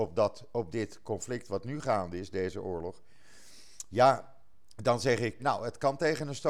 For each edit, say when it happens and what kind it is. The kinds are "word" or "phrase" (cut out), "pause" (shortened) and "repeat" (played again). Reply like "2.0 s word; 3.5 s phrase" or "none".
5.4 s word